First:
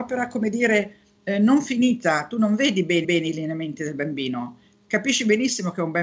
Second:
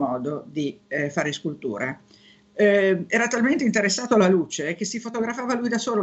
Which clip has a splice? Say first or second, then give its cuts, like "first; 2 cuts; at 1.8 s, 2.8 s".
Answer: first; 1 cut; at 3.0 s